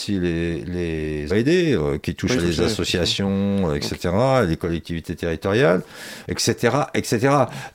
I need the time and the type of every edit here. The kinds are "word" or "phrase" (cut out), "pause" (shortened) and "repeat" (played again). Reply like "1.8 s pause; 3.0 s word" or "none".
1.3 s word; 2.4 s word; 6.2 s word